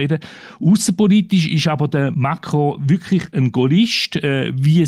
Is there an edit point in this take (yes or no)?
no